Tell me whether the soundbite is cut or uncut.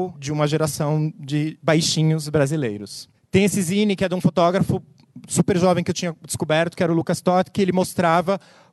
uncut